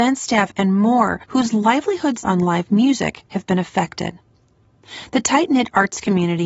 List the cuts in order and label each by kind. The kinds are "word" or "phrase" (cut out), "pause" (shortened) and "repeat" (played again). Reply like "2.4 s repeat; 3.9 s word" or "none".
1.2 s pause; 2.2 s word; 3.3 s pause